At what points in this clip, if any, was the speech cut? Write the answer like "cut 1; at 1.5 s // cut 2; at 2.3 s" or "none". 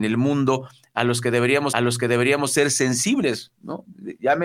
cut 1; at 1.7 s